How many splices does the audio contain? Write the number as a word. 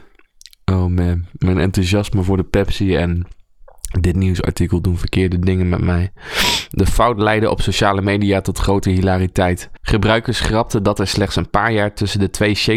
zero